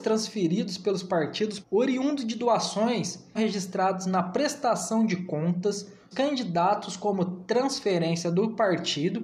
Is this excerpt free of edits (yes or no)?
no